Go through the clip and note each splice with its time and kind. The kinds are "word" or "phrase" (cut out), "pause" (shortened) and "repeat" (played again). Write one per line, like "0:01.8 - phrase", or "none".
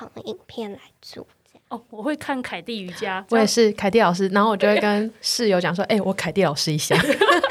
none